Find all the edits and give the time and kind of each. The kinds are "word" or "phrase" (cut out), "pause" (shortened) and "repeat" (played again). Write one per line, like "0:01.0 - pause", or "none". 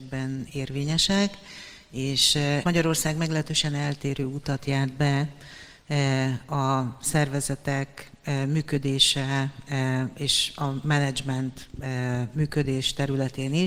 0:02.6 - word